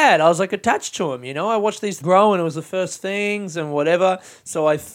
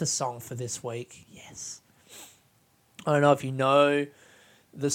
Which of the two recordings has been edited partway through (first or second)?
first